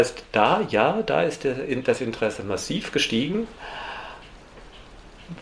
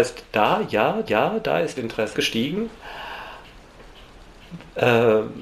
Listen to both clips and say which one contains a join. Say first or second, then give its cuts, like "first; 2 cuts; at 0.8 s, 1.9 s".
second; 3 cuts; at 1.1 s, 1.8 s, 2.1 s